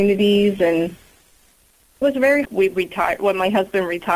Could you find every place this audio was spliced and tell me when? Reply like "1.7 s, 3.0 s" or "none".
2.0 s, 2.4 s